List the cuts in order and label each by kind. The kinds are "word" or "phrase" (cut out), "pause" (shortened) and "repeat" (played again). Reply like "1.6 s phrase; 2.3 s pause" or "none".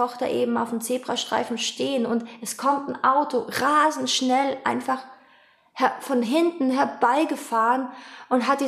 none

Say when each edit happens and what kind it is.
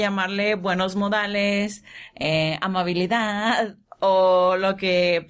none

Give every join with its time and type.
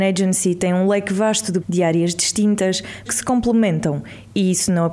1.6 s word; 3.1 s word

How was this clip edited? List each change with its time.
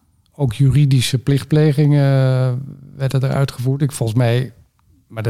none

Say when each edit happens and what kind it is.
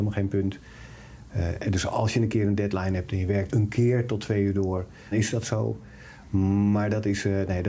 3.5 s word; 5.1 s word

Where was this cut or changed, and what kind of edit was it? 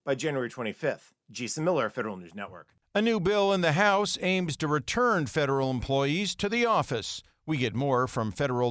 none

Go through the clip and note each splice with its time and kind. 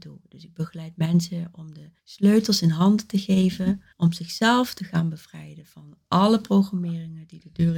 2.0 s pause; 3.9 s pause

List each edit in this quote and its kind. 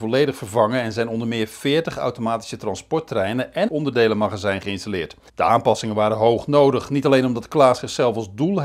3.7 s phrase; 5.3 s pause

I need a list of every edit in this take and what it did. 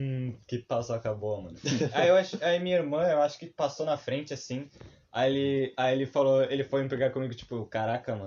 none

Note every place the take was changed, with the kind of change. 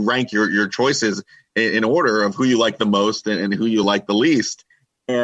none

